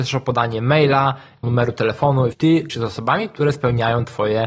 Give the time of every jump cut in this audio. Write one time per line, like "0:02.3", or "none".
0:01.4
0:02.3
0:02.7